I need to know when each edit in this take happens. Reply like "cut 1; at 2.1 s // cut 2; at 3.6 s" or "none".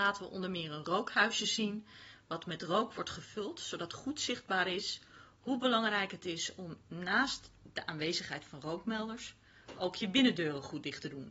none